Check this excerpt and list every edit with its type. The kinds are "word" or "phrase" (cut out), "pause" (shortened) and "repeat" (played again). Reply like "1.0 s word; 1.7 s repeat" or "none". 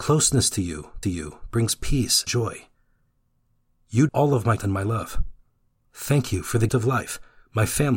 1.0 s repeat; 2.3 s word; 4.1 s word; 4.6 s word; 5.7 s pause; 6.7 s word